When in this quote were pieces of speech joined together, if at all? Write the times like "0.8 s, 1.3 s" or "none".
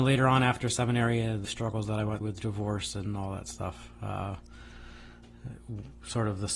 1.4 s, 2.2 s